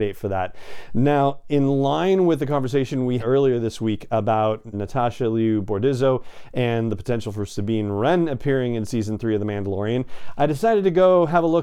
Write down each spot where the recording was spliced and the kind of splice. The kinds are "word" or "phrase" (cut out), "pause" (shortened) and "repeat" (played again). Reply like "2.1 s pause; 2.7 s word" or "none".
3.2 s word; 4.7 s word